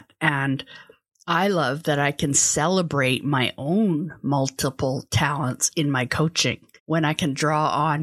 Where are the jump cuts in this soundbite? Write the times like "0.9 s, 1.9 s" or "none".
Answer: 6.8 s